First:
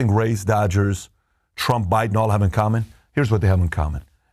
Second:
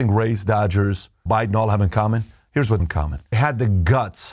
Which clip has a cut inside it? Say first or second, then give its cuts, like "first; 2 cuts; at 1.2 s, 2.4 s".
second; 3 cuts; at 1.3 s, 2.8 s, 3.3 s